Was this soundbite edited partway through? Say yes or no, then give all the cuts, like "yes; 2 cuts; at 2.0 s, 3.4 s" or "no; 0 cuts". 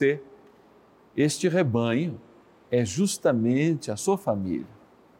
no; 0 cuts